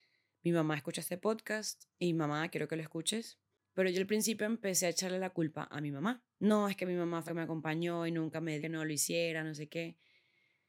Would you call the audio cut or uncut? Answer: cut